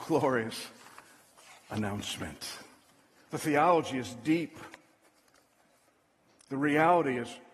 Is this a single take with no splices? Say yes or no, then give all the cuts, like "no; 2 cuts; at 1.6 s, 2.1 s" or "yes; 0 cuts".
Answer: yes; 0 cuts